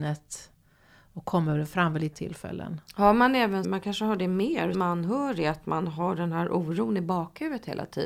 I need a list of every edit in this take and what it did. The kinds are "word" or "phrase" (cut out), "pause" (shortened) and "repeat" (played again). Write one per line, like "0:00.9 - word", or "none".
0:02.1 - word
0:03.6 - word
0:04.7 - word